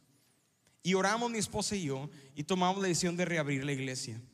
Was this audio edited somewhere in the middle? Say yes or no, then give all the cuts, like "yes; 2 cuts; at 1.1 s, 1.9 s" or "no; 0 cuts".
no; 0 cuts